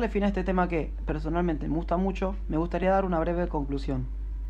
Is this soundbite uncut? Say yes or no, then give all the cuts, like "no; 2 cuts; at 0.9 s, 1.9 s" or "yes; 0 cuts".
yes; 0 cuts